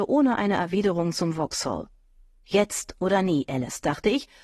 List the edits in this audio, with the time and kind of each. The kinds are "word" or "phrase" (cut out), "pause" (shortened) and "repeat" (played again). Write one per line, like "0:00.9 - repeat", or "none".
none